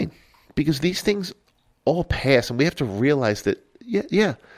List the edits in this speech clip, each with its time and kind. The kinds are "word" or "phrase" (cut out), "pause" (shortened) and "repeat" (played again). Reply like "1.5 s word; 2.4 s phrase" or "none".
none